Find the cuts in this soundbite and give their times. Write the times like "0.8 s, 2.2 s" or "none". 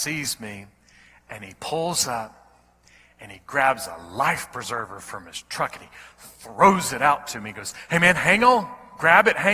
none